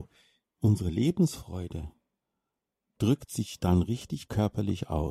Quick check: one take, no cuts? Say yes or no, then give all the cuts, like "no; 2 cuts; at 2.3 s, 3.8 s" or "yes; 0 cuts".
yes; 0 cuts